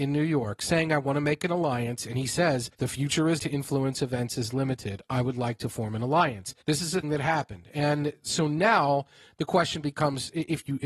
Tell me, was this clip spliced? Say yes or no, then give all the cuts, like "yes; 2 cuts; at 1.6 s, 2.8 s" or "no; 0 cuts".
yes; 4 cuts; at 2.7 s, 3.4 s, 6.6 s, 7.0 s